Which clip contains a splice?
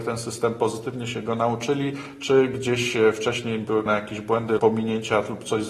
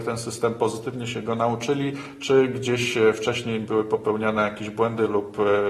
first; 2 cuts; at 3.9 s, 4.6 s

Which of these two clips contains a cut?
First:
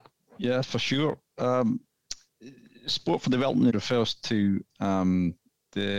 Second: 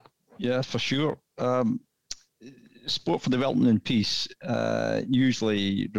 first; 1 cut; at 3.7 s

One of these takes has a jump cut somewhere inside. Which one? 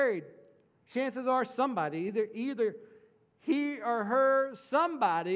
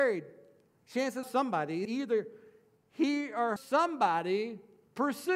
second; 3 cuts; at 1.2 s, 1.8 s, 3.6 s

